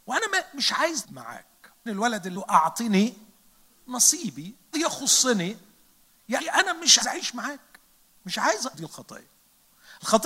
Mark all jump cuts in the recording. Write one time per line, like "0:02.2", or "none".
0:01.0
0:01.9
0:02.4
0:04.7
0:06.4
0:07.0
0:08.7